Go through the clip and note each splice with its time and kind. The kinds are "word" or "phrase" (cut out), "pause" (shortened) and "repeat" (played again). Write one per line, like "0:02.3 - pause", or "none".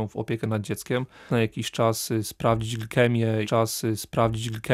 0:01.3 - word
0:03.4 - repeat